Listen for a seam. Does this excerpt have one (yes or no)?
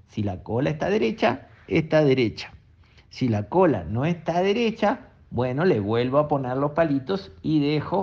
no